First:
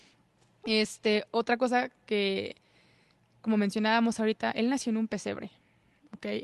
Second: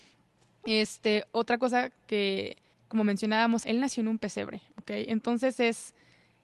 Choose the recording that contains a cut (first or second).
second